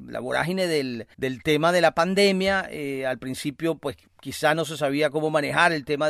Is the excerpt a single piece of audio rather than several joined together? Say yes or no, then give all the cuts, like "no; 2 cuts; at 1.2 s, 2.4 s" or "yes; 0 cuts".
no; 2 cuts; at 1.1 s, 4.1 s